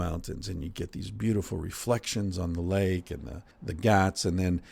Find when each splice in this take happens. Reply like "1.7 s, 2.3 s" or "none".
3.5 s